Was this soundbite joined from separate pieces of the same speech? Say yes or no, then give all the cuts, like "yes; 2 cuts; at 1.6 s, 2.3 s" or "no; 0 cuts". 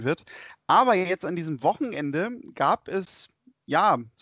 no; 0 cuts